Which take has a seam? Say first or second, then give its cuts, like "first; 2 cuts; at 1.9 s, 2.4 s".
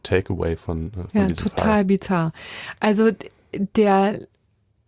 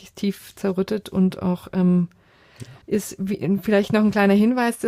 second; 1 cut; at 2.8 s